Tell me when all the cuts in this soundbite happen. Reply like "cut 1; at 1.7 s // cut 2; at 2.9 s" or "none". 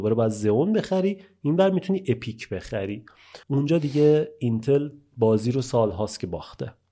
cut 1; at 3.4 s